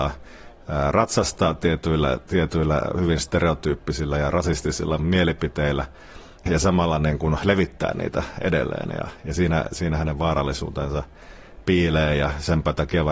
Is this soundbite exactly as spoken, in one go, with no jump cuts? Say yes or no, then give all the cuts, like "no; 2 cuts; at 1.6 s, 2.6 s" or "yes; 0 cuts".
yes; 0 cuts